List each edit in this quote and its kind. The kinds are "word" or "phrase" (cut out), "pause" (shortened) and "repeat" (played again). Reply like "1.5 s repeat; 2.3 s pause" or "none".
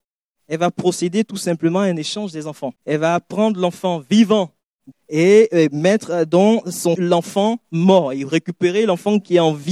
2.8 s pause; 4.9 s phrase; 7.0 s phrase

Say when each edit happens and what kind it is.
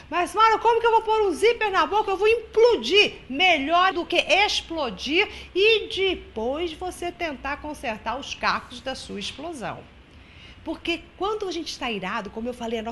3.9 s word

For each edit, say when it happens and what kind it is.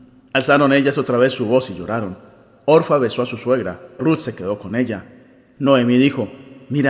4.0 s word

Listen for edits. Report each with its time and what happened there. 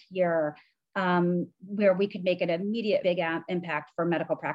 3.0 s word

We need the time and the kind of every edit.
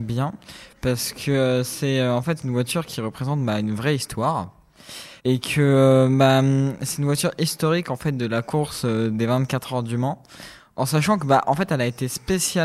5.2 s pause

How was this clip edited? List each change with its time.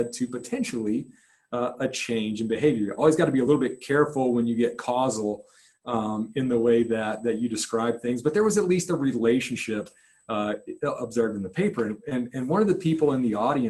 none

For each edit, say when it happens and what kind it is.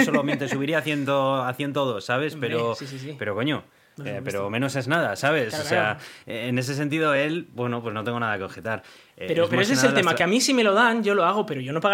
none

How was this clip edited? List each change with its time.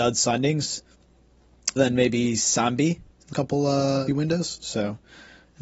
1.8 s word; 3.3 s word; 4.1 s phrase

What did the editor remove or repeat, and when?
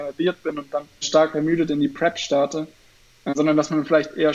1.0 s word; 3.3 s word

